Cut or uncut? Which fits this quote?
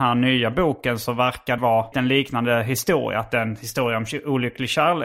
cut